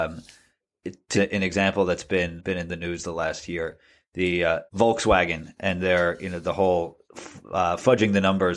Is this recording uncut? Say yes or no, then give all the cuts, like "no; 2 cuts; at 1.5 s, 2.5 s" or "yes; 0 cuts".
no; 4 cuts; at 1.1 s, 2.4 s, 4.7 s, 7.0 s